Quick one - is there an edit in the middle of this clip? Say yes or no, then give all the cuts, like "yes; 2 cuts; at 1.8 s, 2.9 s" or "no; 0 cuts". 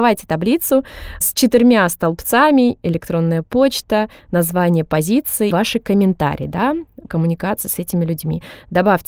yes; 4 cuts; at 1.2 s, 2.8 s, 5.5 s, 7.1 s